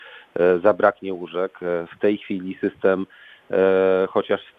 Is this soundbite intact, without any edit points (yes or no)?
yes